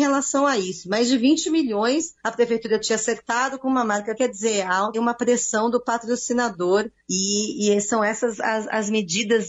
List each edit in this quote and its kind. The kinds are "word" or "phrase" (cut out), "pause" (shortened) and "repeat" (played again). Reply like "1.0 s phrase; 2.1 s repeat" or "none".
2.2 s pause; 4.2 s phrase; 4.9 s word; 7.0 s pause